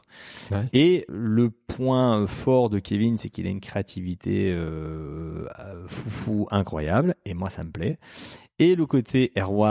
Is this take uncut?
no; 1 cut; at 1.1 s

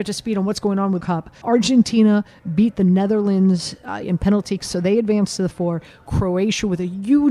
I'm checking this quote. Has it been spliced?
yes; 5 cuts; at 1.0 s, 1.4 s, 4.0 s, 4.6 s, 5.5 s

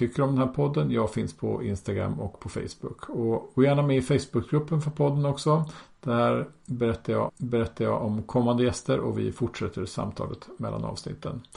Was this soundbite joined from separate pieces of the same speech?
yes; 1 cut; at 7.3 s

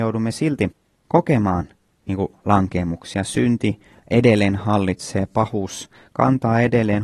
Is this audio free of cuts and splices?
yes; 0 cuts

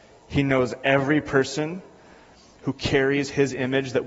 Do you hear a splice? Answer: no; 0 cuts

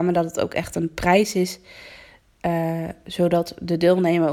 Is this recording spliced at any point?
no; 0 cuts

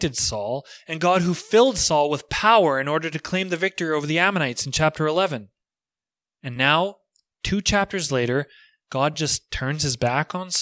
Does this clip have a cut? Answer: no; 0 cuts

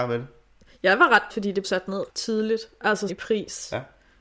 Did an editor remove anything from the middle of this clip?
yes; 4 cuts; at 1.3 s, 1.6 s, 2.1 s, 3.1 s

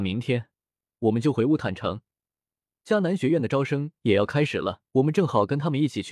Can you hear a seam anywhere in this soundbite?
yes; 1 cut; at 4.9 s

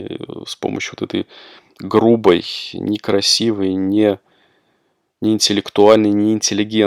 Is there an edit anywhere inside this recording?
no; 0 cuts

